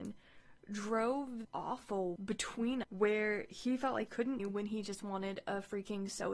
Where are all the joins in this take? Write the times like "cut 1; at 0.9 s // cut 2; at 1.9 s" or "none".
cut 1; at 1.4 s // cut 2; at 2.2 s // cut 3; at 2.8 s // cut 4; at 4.1 s // cut 5; at 4.4 s